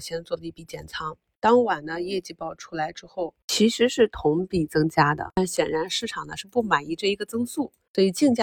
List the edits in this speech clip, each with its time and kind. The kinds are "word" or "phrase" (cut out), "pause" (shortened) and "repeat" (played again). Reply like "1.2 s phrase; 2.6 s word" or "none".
none